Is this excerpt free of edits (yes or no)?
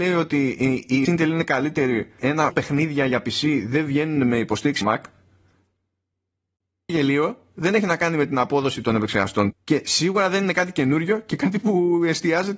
no